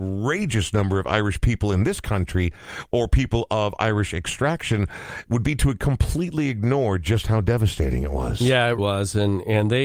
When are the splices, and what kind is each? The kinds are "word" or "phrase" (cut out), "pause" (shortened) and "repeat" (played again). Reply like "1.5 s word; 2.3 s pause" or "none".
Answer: 8.8 s word